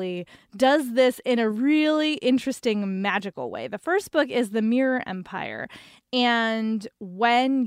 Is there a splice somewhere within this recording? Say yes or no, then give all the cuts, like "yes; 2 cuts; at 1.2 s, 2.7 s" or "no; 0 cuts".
no; 0 cuts